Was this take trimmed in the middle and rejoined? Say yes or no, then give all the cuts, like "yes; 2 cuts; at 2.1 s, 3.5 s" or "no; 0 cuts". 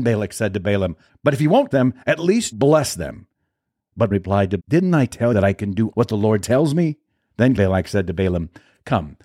yes; 8 cuts; at 1.1 s, 1.7 s, 2.5 s, 4.1 s, 4.6 s, 5.3 s, 5.9 s, 7.6 s